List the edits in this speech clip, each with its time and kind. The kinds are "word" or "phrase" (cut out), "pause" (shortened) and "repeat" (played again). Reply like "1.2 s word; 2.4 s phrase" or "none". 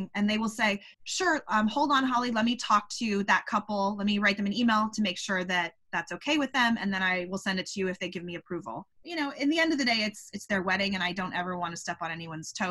0.9 s pause; 8.9 s pause